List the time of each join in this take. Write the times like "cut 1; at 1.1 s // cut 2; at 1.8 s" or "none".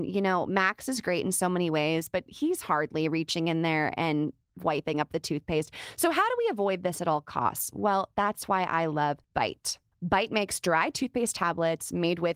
cut 1; at 9.2 s